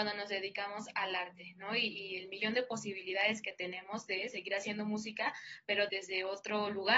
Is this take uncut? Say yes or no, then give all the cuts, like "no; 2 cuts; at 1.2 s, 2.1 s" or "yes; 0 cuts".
no; 1 cut; at 5.9 s